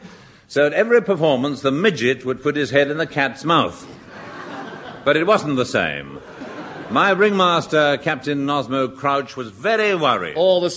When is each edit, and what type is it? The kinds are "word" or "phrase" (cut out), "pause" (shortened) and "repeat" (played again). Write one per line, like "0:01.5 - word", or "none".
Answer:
none